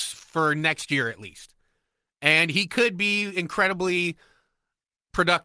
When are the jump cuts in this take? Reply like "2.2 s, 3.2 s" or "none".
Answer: none